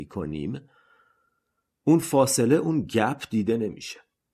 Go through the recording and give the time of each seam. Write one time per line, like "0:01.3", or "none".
none